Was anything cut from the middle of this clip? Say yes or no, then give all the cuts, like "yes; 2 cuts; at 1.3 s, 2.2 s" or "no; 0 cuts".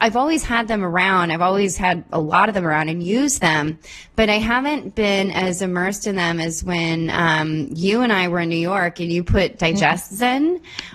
no; 0 cuts